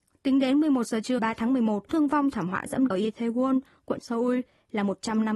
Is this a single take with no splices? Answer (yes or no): no